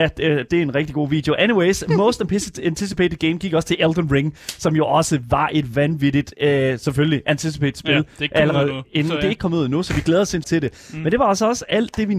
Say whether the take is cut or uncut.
cut